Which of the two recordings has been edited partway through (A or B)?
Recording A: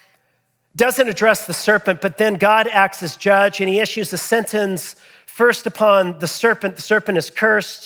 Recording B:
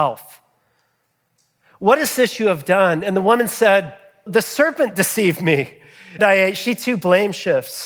B